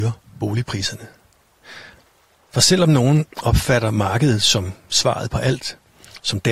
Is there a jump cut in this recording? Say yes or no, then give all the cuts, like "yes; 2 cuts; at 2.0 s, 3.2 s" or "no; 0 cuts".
no; 0 cuts